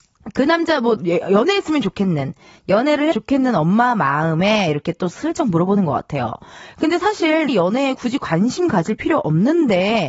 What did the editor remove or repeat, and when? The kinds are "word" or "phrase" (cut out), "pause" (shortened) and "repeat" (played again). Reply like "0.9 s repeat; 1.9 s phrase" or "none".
1.0 s word; 3.1 s word; 7.5 s word